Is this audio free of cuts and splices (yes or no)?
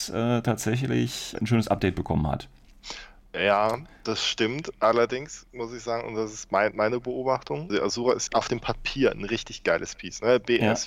no